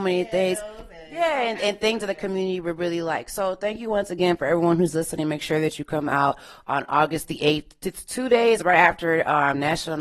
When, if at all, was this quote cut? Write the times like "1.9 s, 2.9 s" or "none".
none